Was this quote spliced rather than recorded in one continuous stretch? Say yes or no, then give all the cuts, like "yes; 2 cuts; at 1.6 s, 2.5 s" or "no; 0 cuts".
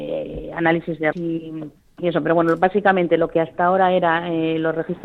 yes; 2 cuts; at 1.1 s, 1.8 s